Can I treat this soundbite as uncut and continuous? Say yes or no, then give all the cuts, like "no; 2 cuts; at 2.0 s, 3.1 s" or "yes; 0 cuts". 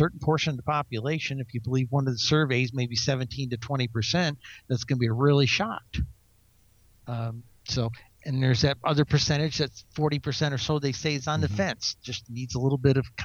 yes; 0 cuts